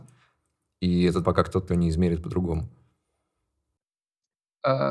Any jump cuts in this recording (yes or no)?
yes